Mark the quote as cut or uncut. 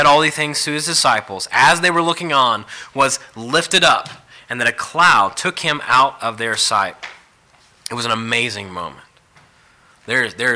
uncut